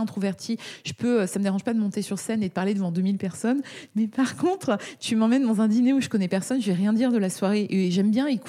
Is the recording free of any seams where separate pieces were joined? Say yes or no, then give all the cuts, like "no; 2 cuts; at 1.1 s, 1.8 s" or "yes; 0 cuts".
yes; 0 cuts